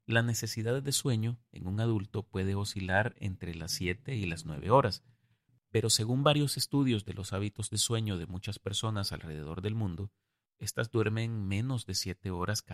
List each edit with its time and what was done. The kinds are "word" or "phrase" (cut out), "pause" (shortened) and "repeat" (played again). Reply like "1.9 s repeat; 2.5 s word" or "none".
none